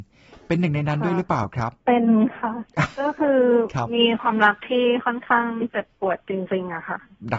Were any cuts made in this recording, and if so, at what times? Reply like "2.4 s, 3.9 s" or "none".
1.8 s